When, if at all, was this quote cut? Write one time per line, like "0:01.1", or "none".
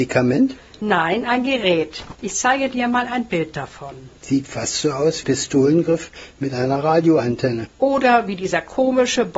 0:05.2
0:07.7